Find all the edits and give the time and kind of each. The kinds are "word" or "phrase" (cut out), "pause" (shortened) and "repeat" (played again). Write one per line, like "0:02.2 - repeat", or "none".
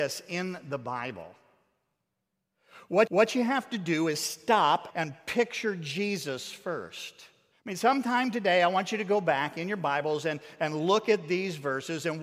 0:03.1 - repeat
0:04.9 - word
0:07.5 - pause